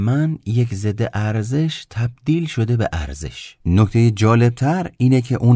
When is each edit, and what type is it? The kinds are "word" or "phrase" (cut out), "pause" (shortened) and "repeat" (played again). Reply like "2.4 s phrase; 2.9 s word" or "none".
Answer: 3.6 s pause